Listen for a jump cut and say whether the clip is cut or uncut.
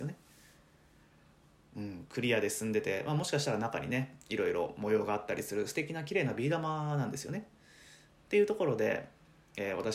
uncut